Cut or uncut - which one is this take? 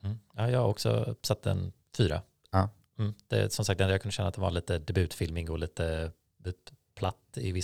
uncut